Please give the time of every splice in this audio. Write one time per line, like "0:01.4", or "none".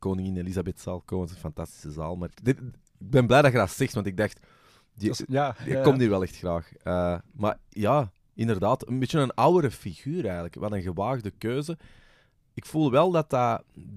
0:02.3